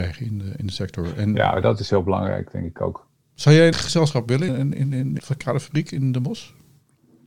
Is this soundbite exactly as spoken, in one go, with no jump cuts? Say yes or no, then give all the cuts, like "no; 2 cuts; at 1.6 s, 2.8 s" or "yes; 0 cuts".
no; 3 cuts; at 3.7 s, 4.5 s, 5.2 s